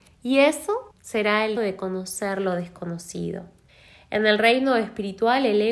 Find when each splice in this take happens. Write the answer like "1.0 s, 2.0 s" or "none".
0.9 s, 1.6 s, 3.7 s